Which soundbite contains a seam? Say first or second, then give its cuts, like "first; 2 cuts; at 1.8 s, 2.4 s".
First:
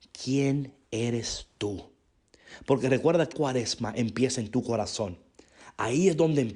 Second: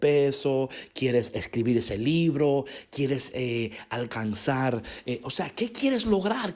first; 1 cut; at 3.3 s